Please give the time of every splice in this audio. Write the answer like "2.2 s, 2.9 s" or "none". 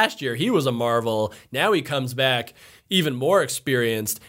none